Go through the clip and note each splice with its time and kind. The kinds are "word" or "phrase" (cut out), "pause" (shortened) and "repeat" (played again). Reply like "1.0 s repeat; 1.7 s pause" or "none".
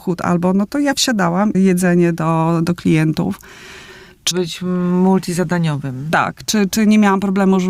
1.5 s phrase; 4.3 s word